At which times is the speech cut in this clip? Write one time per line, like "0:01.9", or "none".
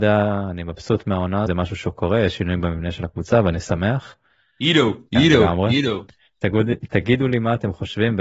0:01.5
0:05.1

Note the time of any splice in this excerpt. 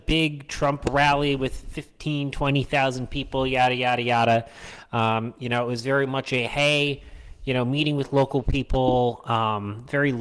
none

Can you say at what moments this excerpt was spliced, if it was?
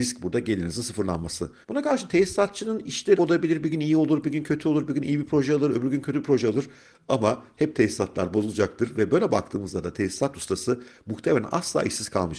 0:01.6
0:03.2

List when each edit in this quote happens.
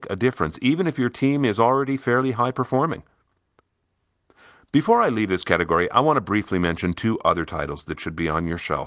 none

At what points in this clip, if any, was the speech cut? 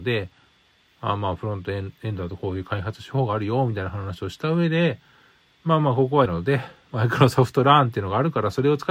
0:06.3

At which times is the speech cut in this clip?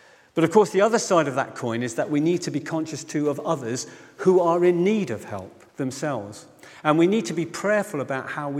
0:05.7

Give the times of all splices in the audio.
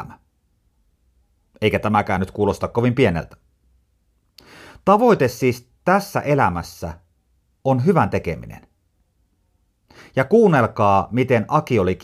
none

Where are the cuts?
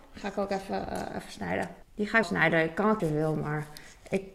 0:01.8
0:02.2
0:03.0

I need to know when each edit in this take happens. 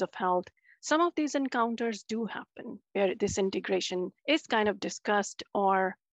0:04.2

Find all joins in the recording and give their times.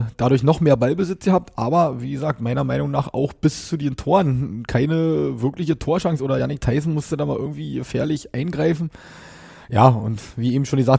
none

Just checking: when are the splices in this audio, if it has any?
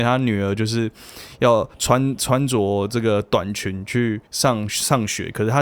0:01.7
0:04.3

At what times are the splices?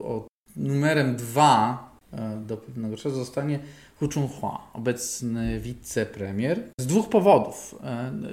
0:02.0
0:06.7

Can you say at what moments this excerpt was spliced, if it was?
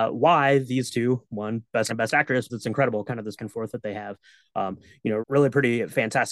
0:01.9
0:02.5
0:03.4
0:05.2

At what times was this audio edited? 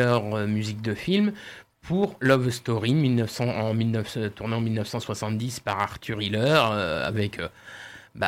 none

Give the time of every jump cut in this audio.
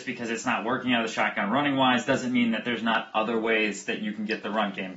none

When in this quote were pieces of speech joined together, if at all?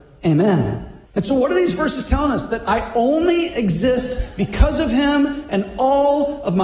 0:01.0

